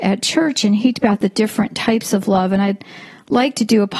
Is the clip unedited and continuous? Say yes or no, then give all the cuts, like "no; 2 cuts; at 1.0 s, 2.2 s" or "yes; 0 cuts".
no; 1 cut; at 0.9 s